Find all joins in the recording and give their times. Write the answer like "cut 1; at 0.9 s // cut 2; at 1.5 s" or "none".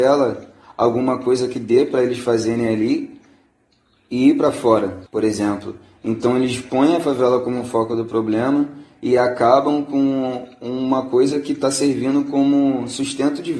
none

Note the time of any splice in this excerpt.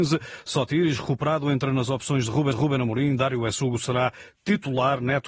cut 1; at 2.5 s

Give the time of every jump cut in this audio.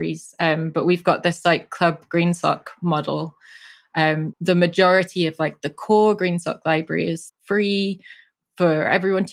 cut 1; at 4.3 s // cut 2; at 7.3 s

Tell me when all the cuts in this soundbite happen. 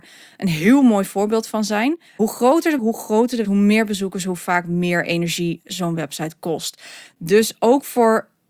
cut 1; at 2.1 s // cut 2; at 2.8 s // cut 3; at 3.4 s

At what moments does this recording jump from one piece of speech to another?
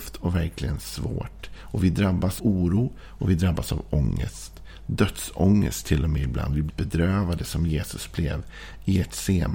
cut 1; at 2.4 s // cut 2; at 6.7 s

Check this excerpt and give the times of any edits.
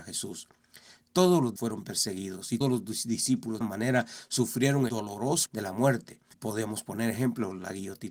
cut 1; at 1.6 s // cut 2; at 2.6 s // cut 3; at 3.6 s // cut 4; at 4.9 s // cut 5; at 5.5 s // cut 6; at 6.3 s

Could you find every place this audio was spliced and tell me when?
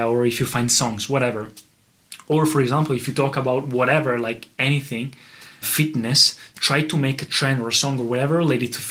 cut 1; at 5.6 s

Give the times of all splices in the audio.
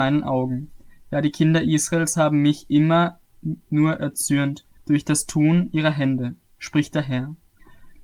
cut 1; at 4.8 s

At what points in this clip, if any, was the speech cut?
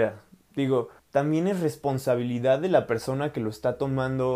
cut 1; at 1.0 s

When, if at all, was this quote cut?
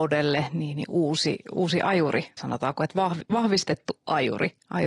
cut 1; at 2.4 s

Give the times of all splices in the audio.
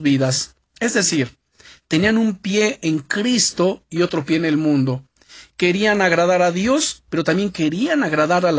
none

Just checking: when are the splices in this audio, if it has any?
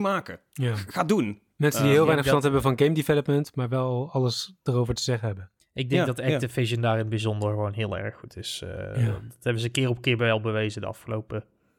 cut 1; at 5.6 s

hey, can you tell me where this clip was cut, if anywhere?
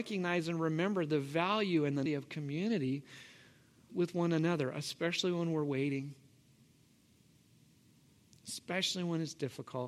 cut 1; at 2.1 s // cut 2; at 3.9 s

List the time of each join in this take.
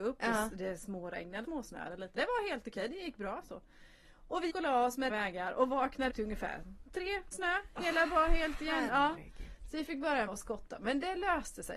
cut 1; at 1.4 s // cut 2; at 2.1 s // cut 3; at 4.5 s // cut 4; at 5.1 s // cut 5; at 6.1 s // cut 6; at 7.3 s // cut 7; at 8.1 s // cut 8; at 10.3 s

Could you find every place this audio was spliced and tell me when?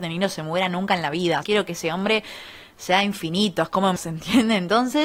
cut 1; at 1.4 s // cut 2; at 4.0 s

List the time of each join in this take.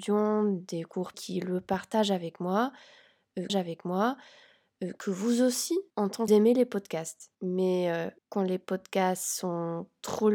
cut 1; at 1.1 s // cut 2; at 3.5 s // cut 3; at 5.9 s // cut 4; at 6.3 s // cut 5; at 7.3 s // cut 6; at 8.2 s

